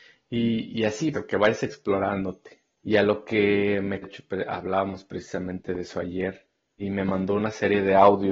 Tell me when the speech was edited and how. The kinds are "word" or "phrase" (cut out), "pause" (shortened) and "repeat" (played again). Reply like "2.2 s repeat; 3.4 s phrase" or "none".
1.1 s word; 2.7 s pause; 4.0 s phrase; 6.8 s word